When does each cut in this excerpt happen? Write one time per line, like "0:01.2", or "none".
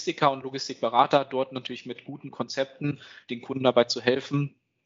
none